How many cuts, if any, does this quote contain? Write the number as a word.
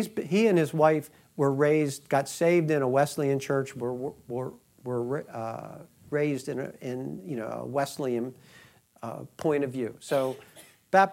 zero